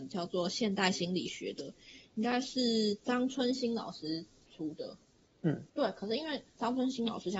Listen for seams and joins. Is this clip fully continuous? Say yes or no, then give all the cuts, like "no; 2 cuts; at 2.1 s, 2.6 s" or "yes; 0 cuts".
no; 1 cut; at 5.7 s